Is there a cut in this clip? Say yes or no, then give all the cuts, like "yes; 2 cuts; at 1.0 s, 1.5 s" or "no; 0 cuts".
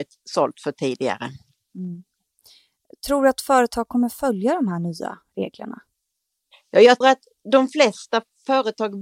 yes; 1 cut; at 7.0 s